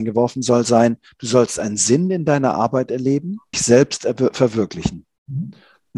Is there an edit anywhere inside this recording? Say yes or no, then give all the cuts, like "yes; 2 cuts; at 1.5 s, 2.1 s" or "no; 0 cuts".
yes; 1 cut; at 3.5 s